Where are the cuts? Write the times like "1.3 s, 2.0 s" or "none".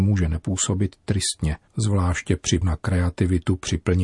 1.7 s, 2.6 s